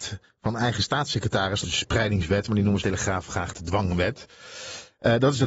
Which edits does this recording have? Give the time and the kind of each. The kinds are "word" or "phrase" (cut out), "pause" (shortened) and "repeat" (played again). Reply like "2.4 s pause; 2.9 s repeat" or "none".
1.6 s word; 2.8 s phrase